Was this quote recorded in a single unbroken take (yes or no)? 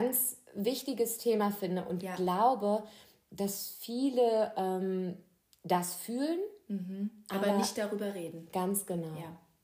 yes